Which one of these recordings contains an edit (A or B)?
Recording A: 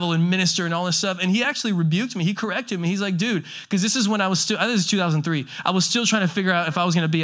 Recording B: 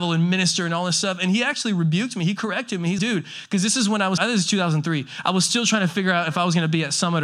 B